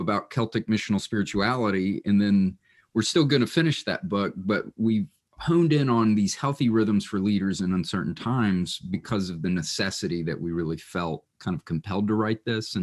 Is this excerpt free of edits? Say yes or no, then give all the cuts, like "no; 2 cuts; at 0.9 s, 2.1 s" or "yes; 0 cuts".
yes; 0 cuts